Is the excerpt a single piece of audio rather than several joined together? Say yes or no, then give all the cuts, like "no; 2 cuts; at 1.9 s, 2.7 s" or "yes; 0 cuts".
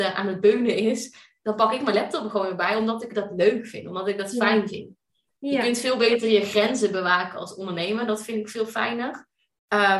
yes; 0 cuts